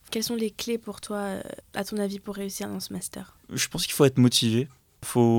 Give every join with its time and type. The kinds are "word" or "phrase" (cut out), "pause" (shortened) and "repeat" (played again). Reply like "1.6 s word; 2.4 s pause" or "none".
3.4 s pause